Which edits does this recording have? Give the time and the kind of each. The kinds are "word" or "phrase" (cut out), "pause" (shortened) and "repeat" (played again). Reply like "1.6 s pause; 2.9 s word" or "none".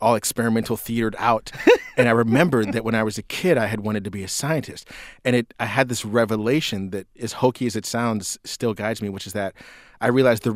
7.1 s pause